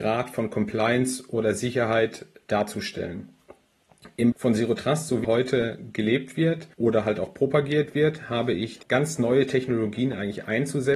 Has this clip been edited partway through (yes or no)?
yes